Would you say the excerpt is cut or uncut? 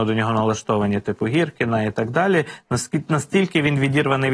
uncut